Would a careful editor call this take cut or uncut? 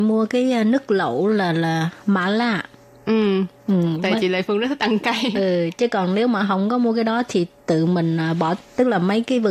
uncut